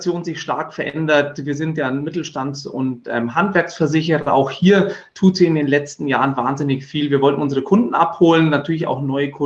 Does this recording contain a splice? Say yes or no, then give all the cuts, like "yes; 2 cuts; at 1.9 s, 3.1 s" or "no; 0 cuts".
no; 0 cuts